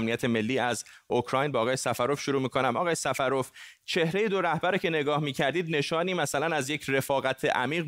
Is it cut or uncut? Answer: uncut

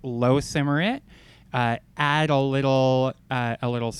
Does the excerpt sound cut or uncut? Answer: uncut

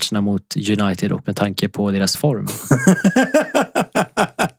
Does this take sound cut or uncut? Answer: cut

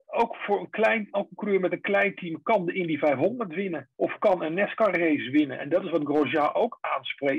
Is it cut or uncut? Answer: cut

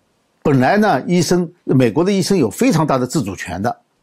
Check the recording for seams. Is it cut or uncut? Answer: cut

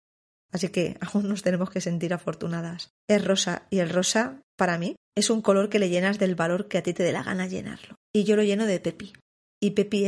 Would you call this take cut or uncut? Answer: cut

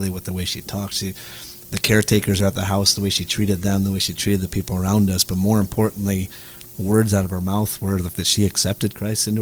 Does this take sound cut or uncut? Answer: cut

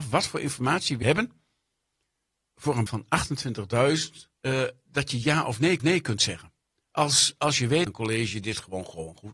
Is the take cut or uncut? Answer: cut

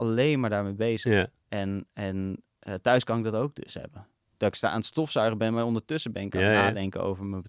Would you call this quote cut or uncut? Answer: uncut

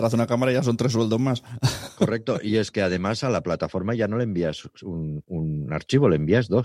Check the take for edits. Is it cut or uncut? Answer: uncut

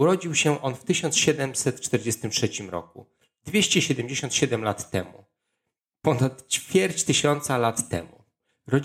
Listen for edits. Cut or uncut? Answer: uncut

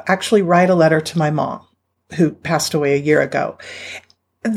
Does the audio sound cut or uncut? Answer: uncut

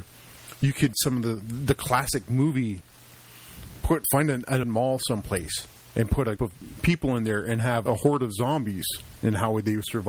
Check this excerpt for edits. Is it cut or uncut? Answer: cut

